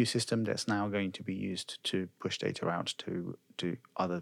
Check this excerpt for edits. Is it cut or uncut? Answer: uncut